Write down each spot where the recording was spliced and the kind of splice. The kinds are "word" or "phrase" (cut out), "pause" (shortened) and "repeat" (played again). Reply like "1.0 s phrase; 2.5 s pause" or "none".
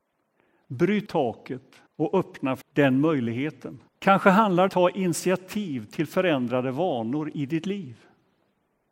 1.1 s word; 1.9 s pause; 2.6 s word; 3.9 s pause; 4.7 s phrase